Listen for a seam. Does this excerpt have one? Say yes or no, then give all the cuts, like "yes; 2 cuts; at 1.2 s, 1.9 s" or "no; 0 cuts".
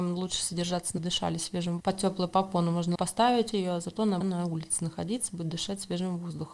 yes; 5 cuts; at 1.0 s, 1.8 s, 2.9 s, 3.5 s, 4.2 s